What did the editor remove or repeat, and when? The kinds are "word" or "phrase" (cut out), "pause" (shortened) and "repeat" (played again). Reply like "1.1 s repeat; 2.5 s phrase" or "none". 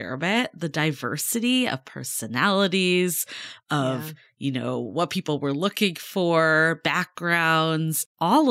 none